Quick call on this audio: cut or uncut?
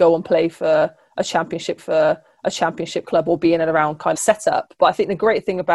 cut